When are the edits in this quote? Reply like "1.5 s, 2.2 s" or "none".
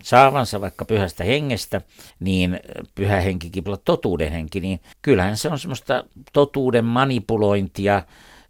2.1 s, 3.7 s, 4.9 s